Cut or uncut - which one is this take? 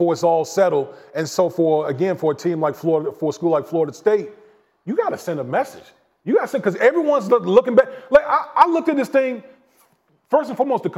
uncut